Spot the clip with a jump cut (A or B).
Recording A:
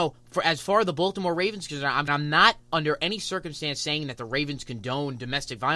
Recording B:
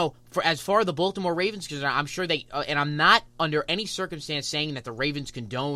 A